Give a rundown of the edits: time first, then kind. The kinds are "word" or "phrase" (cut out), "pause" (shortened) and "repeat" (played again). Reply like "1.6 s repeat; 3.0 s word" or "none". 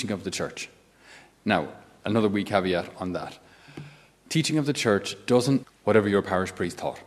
5.6 s word